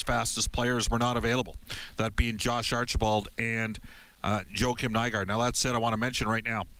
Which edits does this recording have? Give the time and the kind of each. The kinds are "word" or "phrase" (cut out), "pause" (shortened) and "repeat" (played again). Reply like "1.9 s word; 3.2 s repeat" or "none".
none